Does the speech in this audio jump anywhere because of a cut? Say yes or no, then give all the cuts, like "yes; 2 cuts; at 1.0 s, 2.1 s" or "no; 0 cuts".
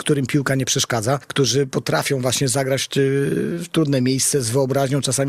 no; 0 cuts